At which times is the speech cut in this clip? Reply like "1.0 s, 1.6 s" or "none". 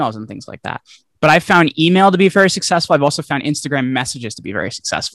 none